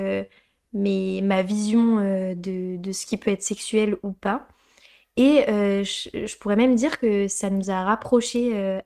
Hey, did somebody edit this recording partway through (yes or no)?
no